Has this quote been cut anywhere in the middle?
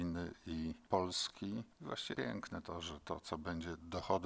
yes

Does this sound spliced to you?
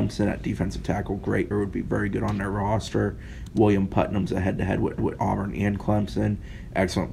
yes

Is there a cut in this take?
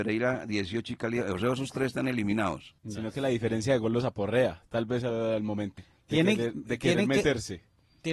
yes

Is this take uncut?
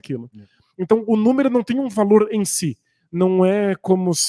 yes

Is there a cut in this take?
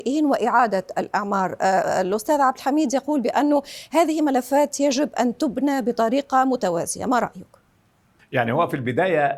no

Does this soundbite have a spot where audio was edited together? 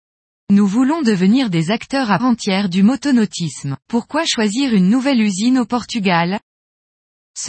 yes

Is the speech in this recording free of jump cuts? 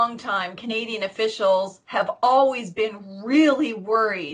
yes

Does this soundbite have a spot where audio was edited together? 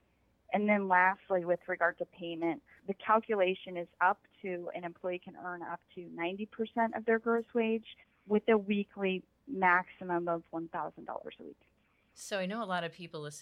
no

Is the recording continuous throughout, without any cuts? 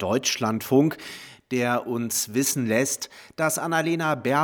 yes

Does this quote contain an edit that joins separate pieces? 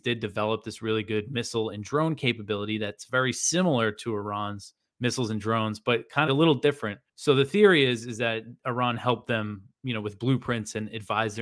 yes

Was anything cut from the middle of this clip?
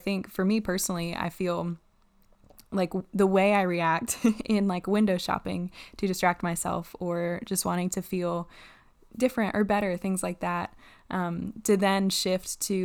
no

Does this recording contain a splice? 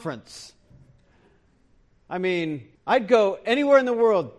yes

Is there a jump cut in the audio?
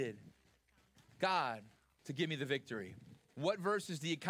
no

